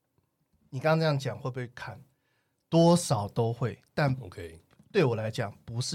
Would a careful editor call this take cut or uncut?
uncut